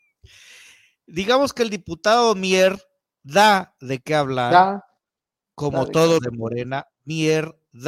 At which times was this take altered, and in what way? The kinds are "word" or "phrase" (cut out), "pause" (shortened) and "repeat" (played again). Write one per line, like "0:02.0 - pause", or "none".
0:06.2 - word